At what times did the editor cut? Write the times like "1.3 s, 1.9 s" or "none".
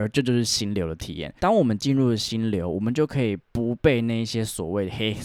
1.4 s, 3.4 s